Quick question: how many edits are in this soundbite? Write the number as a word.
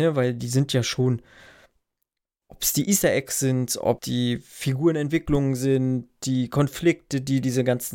one